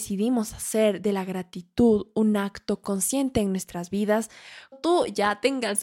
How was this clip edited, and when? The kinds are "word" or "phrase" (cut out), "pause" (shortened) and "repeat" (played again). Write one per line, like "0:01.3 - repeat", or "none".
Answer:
0:04.7 - word